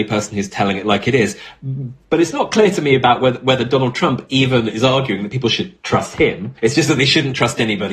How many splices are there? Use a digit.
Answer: 1